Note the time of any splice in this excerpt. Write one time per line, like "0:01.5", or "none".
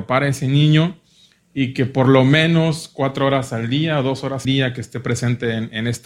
0:04.4